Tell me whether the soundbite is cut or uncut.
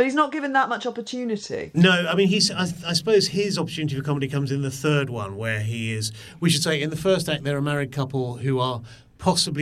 uncut